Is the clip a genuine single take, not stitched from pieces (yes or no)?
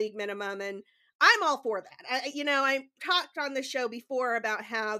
no